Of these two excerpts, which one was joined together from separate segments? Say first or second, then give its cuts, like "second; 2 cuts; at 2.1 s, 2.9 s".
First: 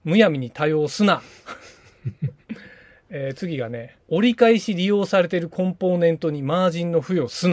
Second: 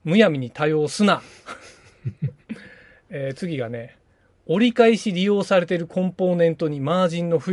first; 1 cut; at 4.0 s